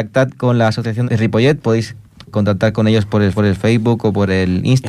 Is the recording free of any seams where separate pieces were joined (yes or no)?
no